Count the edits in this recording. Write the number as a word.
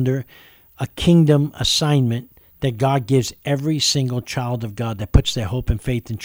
zero